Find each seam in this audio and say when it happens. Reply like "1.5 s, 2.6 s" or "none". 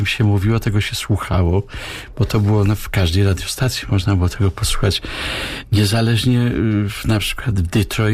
none